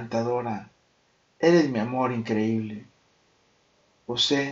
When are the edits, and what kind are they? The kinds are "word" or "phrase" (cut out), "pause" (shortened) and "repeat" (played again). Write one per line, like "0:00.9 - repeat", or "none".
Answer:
none

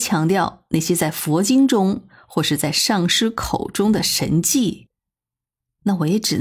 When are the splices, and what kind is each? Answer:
none

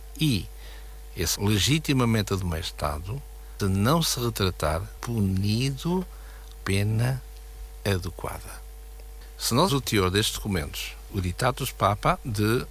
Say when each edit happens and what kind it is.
0:01.4 - word
0:03.6 - word
0:05.0 - word
0:06.6 - word
0:09.7 - word
0:11.1 - word

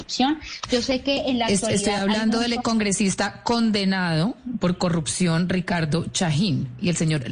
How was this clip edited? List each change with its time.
none

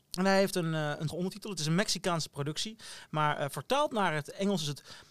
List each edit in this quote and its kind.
0:01.1 - word

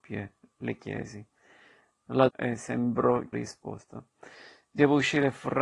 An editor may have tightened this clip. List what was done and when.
0:02.3 - phrase
0:03.3 - phrase

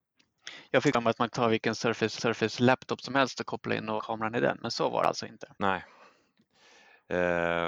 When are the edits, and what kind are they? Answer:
0:01.3 - word
0:02.2 - repeat
0:04.0 - word
0:05.5 - pause

